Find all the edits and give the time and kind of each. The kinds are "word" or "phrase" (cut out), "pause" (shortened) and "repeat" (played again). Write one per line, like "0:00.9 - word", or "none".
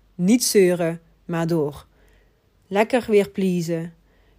none